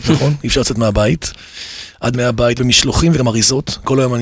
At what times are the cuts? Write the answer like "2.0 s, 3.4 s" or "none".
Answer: 2.1 s, 2.6 s, 3.2 s